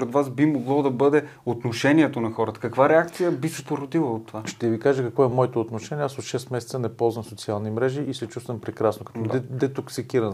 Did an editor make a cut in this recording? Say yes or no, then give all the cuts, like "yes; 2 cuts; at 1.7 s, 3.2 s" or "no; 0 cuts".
no; 0 cuts